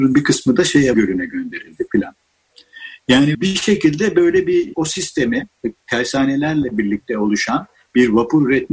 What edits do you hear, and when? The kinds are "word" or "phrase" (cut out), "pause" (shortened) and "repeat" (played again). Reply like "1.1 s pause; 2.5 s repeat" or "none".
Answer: 0.9 s word; 3.3 s word; 4.7 s word